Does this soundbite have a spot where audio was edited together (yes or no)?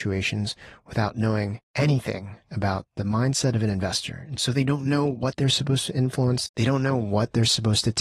no